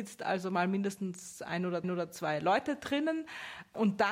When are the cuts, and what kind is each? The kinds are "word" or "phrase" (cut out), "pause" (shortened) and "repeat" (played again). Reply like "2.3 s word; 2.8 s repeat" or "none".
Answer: 1.8 s repeat